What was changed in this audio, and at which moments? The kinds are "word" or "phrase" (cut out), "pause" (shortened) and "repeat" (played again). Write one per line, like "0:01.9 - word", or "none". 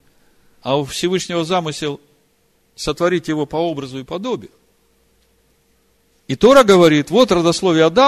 none